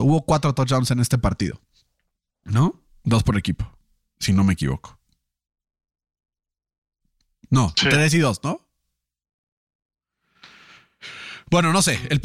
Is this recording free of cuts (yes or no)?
yes